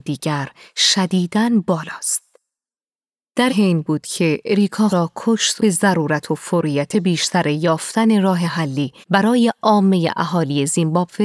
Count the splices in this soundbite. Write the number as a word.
five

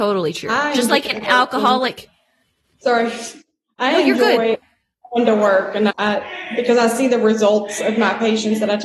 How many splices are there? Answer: one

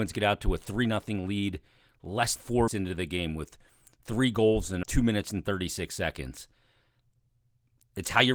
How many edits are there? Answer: three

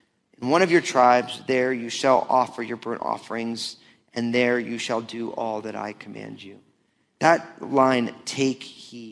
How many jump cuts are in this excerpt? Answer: zero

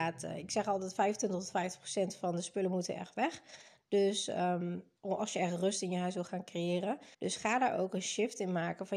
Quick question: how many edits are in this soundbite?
two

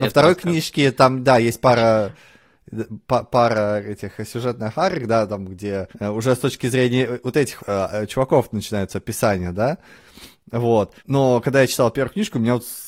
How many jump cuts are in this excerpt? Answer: three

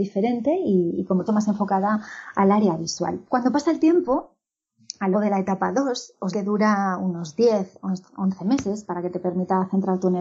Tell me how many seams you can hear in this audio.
four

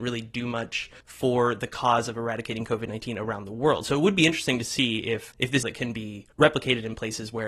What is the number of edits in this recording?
four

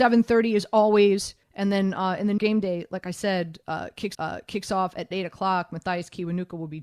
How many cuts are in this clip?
four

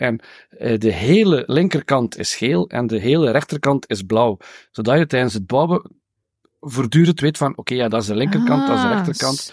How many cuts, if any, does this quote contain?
zero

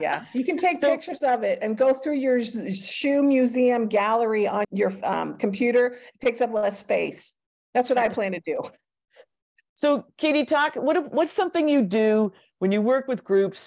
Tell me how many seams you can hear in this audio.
one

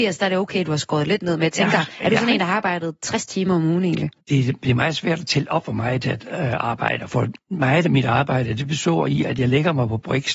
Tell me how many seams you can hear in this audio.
two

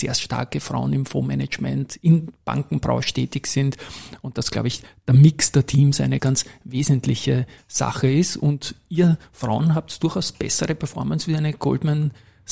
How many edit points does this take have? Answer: one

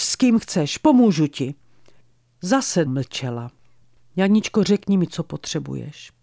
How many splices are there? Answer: one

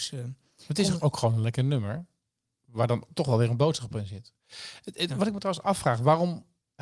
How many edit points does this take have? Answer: zero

